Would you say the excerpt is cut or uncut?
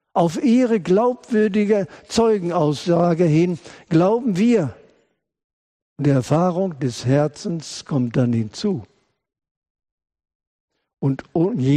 uncut